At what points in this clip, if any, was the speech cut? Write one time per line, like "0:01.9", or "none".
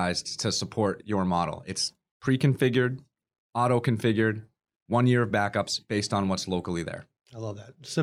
none